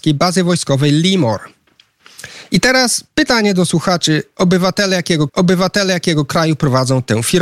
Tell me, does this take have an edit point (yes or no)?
yes